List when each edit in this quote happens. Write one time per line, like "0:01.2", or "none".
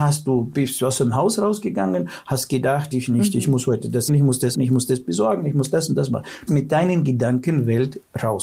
0:02.9
0:04.1
0:04.5
0:06.5